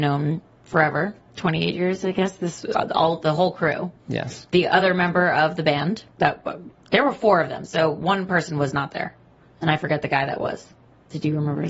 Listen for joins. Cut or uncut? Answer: cut